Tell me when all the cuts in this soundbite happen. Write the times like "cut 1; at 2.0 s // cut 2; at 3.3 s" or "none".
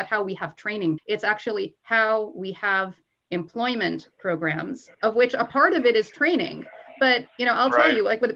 cut 1; at 1.0 s // cut 2; at 4.9 s